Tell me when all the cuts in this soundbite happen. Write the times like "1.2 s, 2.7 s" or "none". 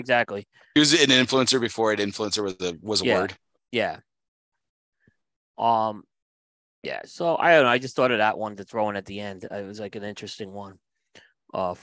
none

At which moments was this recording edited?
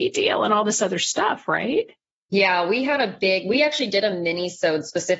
none

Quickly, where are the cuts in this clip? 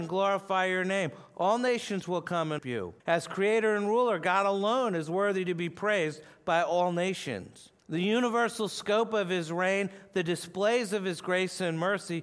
2.6 s, 3.0 s, 7.8 s

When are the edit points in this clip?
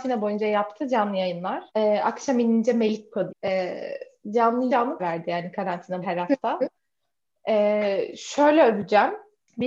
1.7 s, 3.3 s, 4.7 s, 5.0 s, 6.0 s, 6.8 s

